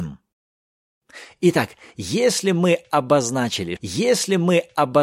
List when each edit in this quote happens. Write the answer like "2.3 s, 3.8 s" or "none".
3.8 s